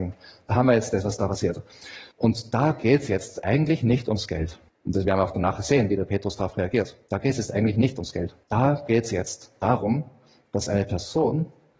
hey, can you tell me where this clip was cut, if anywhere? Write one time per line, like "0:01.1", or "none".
0:02.1
0:04.7
0:07.0
0:08.4